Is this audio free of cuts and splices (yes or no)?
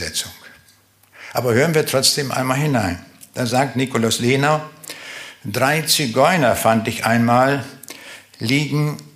yes